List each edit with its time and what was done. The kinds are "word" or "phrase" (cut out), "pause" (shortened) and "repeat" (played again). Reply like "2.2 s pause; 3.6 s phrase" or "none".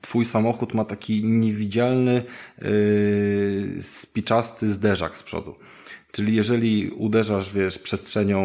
none